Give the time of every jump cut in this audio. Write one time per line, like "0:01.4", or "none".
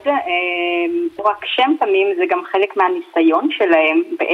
0:01.2